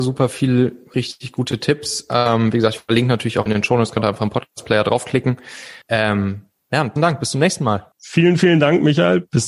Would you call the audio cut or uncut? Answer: cut